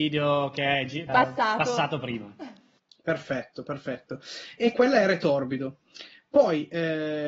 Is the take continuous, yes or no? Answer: no